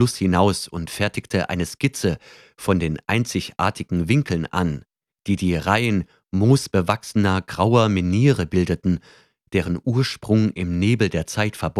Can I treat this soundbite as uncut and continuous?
yes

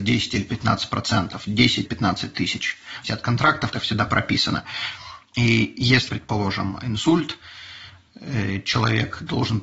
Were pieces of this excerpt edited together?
yes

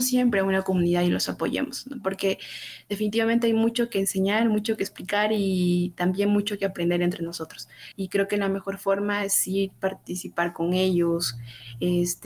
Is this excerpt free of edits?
no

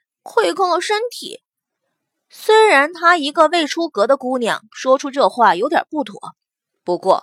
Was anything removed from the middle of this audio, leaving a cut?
no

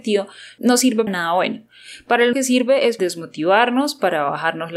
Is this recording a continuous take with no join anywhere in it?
no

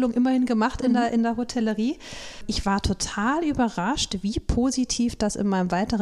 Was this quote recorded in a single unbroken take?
yes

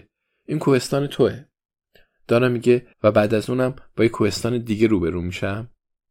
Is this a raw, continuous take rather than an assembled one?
no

